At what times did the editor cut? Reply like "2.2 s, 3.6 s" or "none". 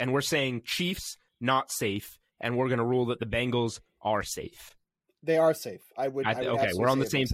none